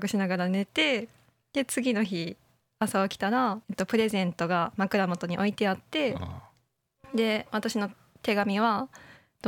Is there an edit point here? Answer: yes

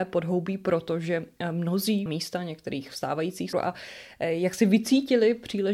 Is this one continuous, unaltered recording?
no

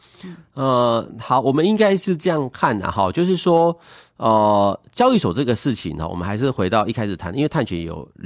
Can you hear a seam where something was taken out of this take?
no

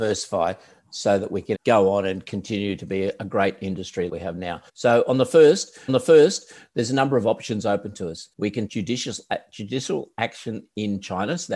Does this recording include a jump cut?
yes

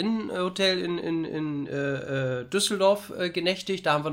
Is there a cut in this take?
no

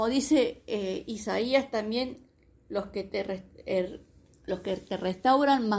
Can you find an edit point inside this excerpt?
no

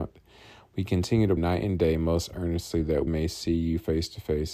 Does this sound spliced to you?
yes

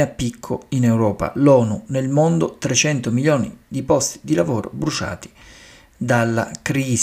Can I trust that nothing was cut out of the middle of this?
yes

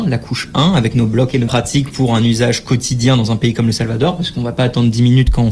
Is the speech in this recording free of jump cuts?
no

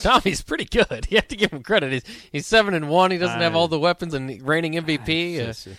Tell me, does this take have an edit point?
yes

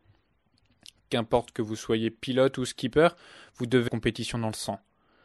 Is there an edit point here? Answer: yes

